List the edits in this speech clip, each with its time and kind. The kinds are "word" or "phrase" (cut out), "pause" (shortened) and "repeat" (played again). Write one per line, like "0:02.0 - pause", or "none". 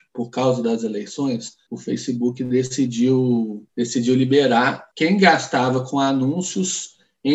none